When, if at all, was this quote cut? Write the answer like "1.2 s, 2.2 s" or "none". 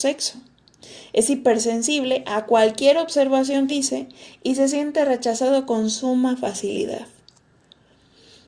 3.7 s